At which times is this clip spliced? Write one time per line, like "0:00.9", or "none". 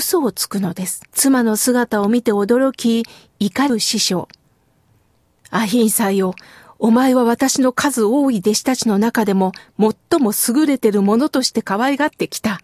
0:01.1